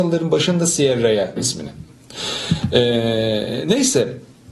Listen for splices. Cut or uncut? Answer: cut